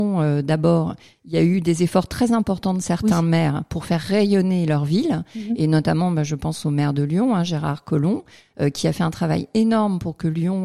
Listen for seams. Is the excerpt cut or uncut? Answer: uncut